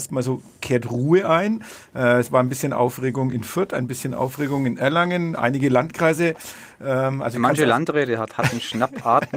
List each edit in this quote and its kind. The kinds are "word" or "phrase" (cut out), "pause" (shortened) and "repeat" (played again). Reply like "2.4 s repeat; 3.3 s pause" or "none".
none